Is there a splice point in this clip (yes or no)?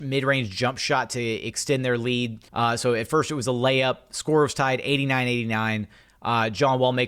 yes